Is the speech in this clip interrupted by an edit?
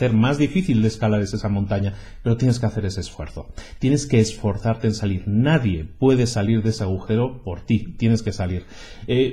no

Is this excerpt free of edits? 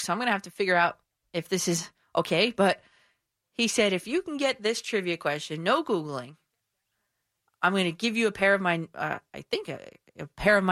yes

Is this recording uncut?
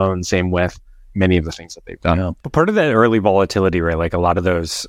no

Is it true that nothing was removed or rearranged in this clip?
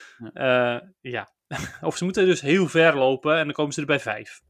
yes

